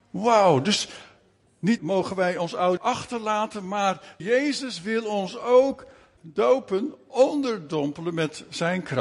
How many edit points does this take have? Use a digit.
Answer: 4